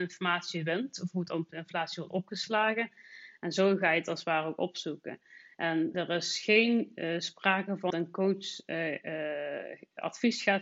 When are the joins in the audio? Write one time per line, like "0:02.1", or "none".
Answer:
0:05.9
0:07.9